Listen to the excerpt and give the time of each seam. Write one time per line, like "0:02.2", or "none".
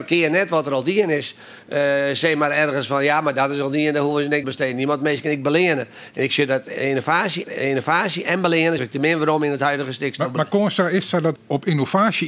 0:04.4
0:07.4
0:08.8
0:11.4